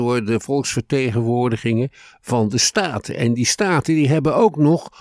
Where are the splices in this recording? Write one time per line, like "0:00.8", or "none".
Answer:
none